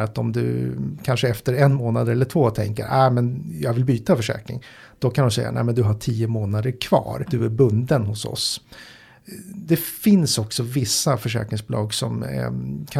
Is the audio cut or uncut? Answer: uncut